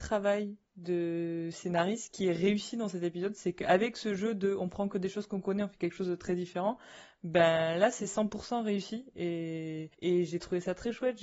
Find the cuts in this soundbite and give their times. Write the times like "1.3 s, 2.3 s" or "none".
9.9 s